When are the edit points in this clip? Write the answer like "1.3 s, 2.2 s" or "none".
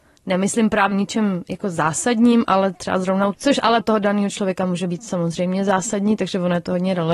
0.9 s, 3.3 s, 3.8 s